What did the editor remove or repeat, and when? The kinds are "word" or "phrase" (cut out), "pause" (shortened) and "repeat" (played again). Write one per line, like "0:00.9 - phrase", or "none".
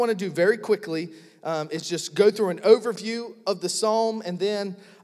none